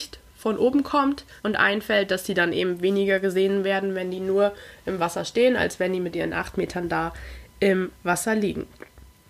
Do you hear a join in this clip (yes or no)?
yes